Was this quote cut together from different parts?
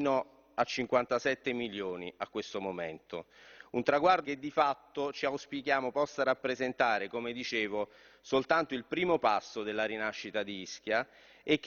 yes; 1 cut; at 4.2 s

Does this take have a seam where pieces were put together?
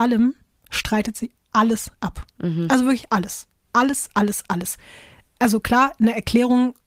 no; 0 cuts

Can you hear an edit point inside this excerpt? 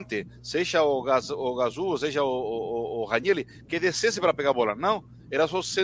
no; 0 cuts

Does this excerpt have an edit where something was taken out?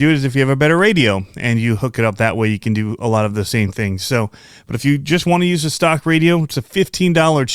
no; 0 cuts

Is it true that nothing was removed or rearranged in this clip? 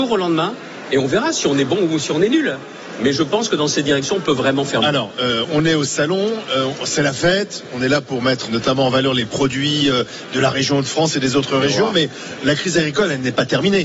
no; 1 cut; at 8.5 s

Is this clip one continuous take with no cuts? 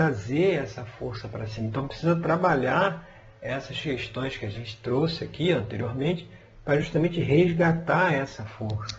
yes; 0 cuts

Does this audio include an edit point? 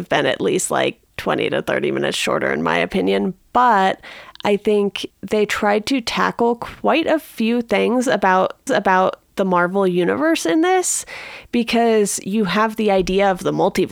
yes; 3 cuts; at 1.1 s, 5.1 s, 8.7 s

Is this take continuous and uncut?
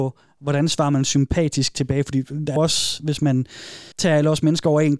no; 2 cuts; at 2.6 s, 3.9 s

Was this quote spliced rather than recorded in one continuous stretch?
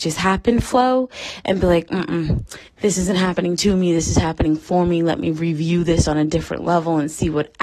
yes; 1 cut; at 2.7 s

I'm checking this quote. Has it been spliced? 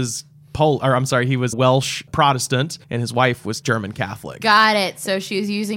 yes; 3 cuts; at 1.5 s, 2.8 s, 3.6 s

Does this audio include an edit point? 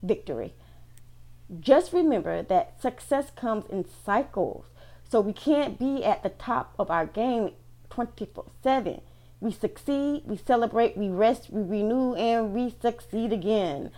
no; 0 cuts

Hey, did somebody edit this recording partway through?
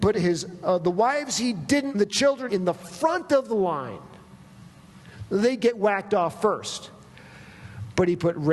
yes; 2 cuts; at 1.9 s, 2.5 s

